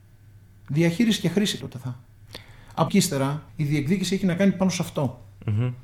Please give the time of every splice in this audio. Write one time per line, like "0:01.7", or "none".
0:01.6
0:02.9
0:03.5